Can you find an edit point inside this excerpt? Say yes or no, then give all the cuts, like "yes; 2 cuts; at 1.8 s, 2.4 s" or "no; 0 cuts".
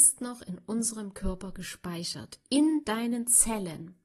no; 0 cuts